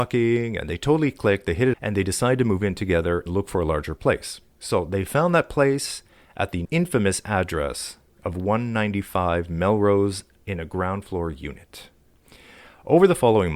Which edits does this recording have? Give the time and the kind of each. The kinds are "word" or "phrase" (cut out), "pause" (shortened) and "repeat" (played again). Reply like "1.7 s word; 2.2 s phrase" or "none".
1.7 s word; 3.3 s word; 6.6 s word; 10.4 s word

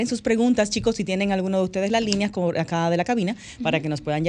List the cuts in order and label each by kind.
none

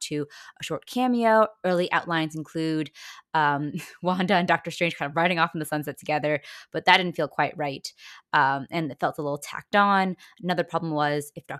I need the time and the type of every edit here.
none

